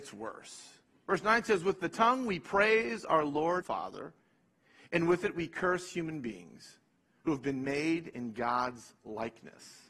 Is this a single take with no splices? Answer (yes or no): no